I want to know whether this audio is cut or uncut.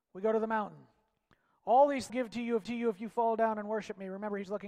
cut